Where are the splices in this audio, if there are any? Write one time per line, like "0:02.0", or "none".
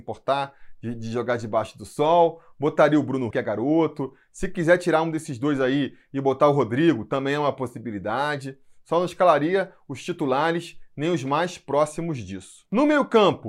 0:03.3